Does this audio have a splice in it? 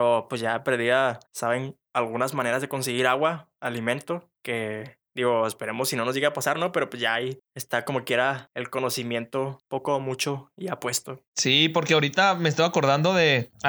yes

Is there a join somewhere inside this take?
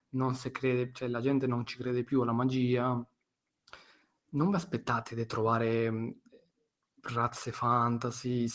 no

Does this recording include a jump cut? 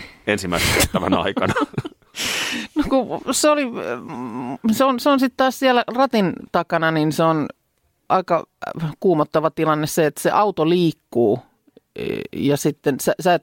no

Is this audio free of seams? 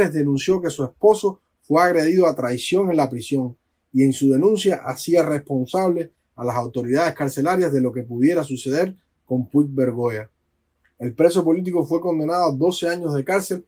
yes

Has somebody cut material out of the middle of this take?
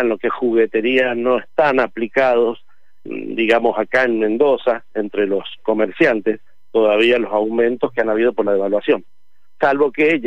yes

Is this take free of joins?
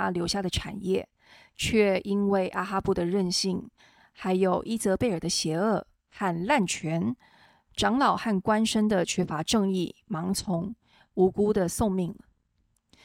yes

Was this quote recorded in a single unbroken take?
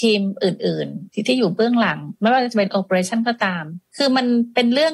no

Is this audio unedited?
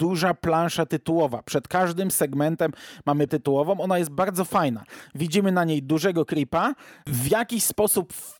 no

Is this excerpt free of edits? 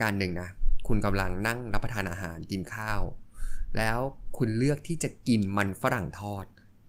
yes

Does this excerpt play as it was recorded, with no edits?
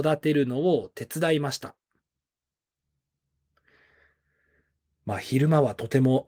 yes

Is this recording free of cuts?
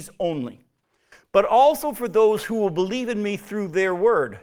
yes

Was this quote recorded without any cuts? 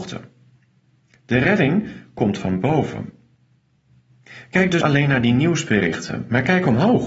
no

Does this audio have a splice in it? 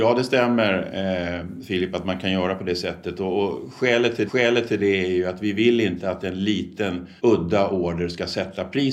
yes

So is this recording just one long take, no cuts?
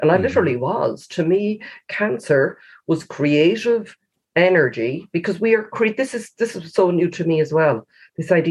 yes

